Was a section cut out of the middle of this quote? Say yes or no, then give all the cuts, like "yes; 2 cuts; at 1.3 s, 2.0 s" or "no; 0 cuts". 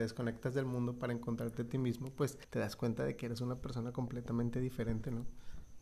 yes; 1 cut; at 2.4 s